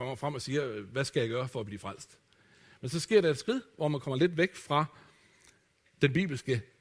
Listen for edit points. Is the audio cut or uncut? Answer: uncut